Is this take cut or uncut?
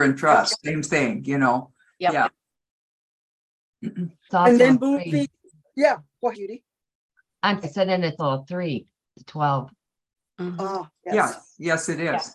cut